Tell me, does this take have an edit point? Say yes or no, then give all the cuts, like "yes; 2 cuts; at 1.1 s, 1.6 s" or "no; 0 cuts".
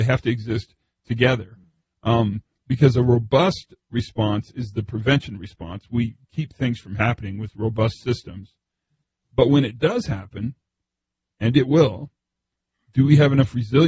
no; 0 cuts